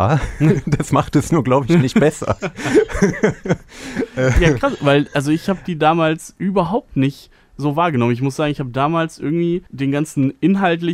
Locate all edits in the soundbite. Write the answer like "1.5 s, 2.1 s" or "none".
9.7 s